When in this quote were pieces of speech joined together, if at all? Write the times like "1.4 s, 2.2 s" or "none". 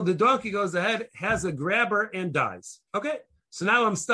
1.1 s, 2.9 s